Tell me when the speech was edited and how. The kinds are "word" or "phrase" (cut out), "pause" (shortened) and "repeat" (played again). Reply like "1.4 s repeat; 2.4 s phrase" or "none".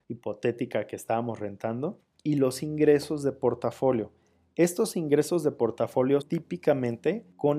6.2 s word